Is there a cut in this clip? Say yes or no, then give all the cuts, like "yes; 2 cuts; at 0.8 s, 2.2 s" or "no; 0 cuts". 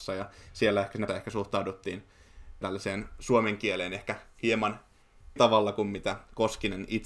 yes; 3 cuts; at 1.1 s, 2.6 s, 5.4 s